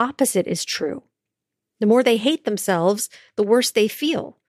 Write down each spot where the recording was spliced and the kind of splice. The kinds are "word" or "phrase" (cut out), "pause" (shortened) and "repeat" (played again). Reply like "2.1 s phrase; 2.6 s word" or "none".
none